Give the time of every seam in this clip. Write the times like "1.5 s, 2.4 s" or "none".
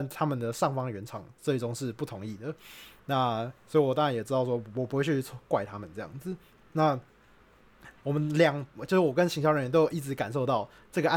1.3 s, 8.0 s